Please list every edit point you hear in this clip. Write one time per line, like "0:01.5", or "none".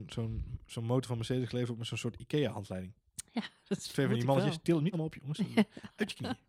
0:04.9